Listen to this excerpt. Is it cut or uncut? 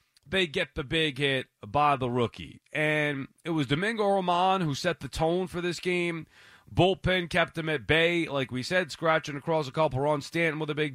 uncut